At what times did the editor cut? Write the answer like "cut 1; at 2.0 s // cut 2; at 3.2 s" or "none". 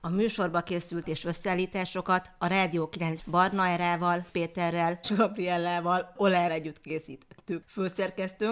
cut 1; at 1.0 s // cut 2; at 3.2 s // cut 3; at 4.3 s // cut 4; at 5.0 s // cut 5; at 6.5 s